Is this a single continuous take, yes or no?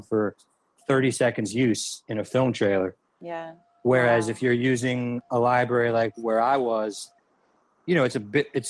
yes